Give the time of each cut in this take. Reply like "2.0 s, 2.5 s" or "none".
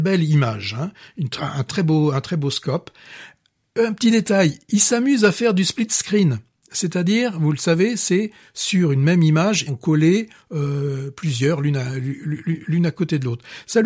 1.7 s, 9.7 s